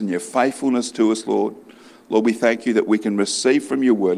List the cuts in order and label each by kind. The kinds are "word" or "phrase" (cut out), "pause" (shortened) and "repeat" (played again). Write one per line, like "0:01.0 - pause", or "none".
none